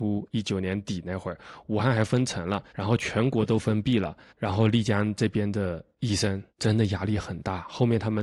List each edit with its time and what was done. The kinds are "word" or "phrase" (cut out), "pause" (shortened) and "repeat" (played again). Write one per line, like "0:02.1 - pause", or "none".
0:02.7 - pause
0:04.3 - pause
0:06.5 - pause